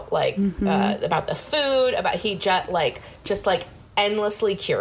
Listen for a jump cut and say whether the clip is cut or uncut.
uncut